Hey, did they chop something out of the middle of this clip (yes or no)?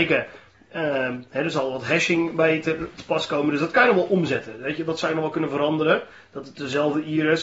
no